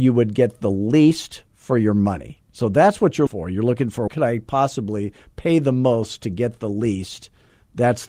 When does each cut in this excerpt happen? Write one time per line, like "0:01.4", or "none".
0:03.3
0:04.1